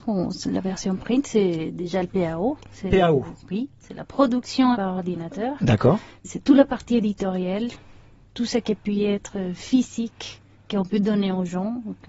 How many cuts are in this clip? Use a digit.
1